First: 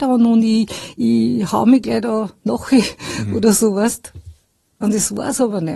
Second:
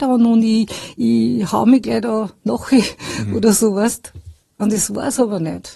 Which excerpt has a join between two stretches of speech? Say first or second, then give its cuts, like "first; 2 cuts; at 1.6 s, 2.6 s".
second; 1 cut; at 4.4 s